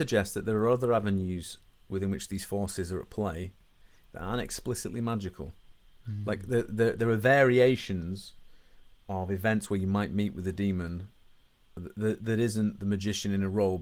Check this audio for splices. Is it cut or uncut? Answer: uncut